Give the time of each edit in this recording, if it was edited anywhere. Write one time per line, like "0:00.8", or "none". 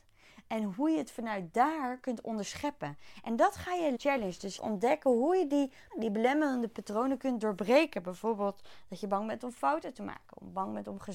0:03.9
0:04.6
0:05.9